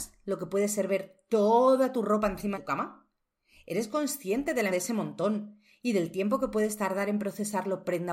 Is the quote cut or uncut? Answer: cut